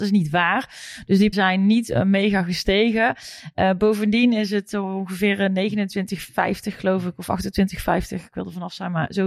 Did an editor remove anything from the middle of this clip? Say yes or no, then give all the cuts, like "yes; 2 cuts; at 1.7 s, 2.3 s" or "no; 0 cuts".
yes; 1 cut; at 1.3 s